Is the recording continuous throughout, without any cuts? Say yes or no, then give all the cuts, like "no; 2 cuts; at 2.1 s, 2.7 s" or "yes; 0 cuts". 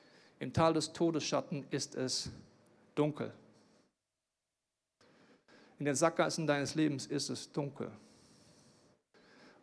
yes; 0 cuts